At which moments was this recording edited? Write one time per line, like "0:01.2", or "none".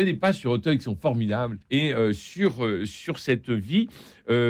0:01.6

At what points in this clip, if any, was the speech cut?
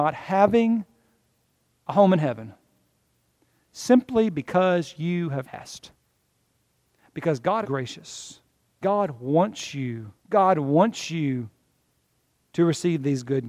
0:05.5
0:06.5
0:07.6
0:08.8
0:10.2

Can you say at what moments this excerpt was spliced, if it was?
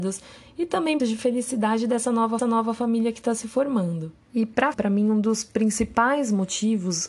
0:01.0
0:02.4
0:04.2
0:04.7

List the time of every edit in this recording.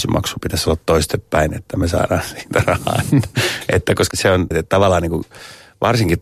0:04.1
0:04.5

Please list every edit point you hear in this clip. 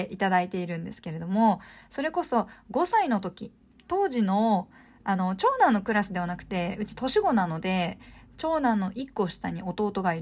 none

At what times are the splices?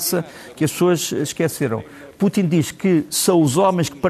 none

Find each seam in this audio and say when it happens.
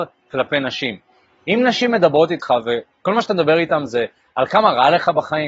none

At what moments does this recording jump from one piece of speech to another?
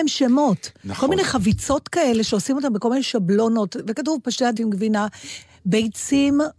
0:04.6

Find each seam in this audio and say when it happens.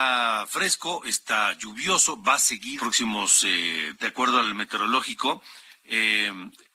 0:02.8
0:03.9

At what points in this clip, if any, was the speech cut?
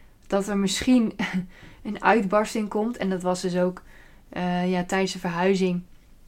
none

